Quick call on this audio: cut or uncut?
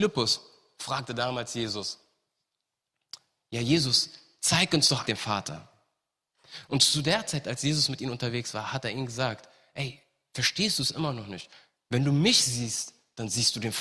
cut